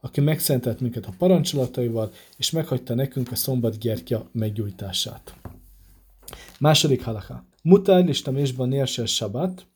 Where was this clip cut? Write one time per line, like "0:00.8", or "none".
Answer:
0:07.5